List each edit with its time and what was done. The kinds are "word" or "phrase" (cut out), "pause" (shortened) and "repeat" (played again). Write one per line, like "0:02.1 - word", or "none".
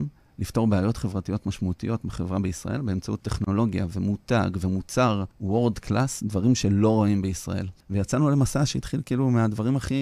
0:05.3 - pause
0:07.8 - pause